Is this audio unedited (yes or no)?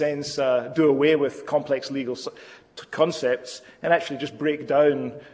yes